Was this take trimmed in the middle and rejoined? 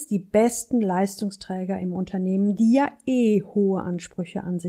no; 0 cuts

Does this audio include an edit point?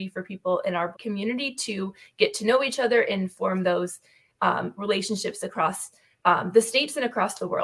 yes; 1 cut; at 0.9 s

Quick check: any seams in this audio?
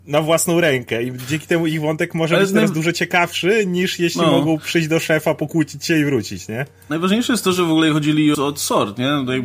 yes; 1 cut; at 8.3 s

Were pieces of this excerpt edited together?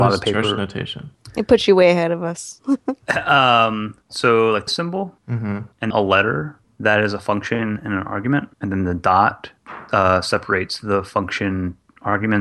yes; 2 cuts; at 4.7 s, 5.9 s

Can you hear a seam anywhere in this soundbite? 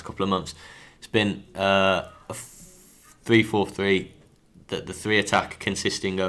no; 0 cuts

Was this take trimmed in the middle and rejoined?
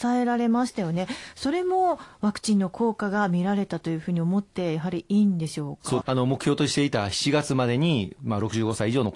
yes; 1 cut; at 6.0 s

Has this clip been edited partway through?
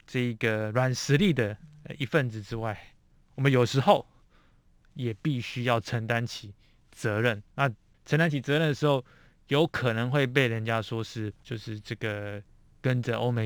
yes; 2 cuts; at 7.5 s, 11.4 s

